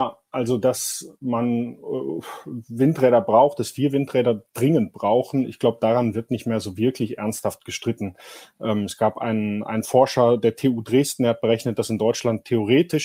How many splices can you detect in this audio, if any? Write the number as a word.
zero